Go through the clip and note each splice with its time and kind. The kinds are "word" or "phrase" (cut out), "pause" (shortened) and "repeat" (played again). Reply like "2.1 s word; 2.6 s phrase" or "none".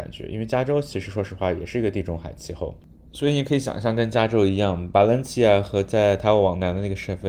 none